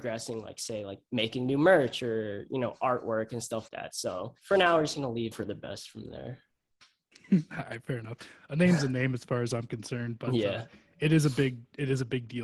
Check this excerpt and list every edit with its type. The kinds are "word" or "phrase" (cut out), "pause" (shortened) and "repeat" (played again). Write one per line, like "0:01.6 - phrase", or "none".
0:01.1 - pause
0:03.7 - word
0:04.4 - pause
0:05.3 - phrase